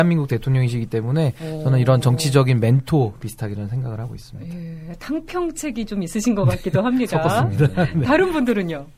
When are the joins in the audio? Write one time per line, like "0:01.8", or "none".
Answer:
none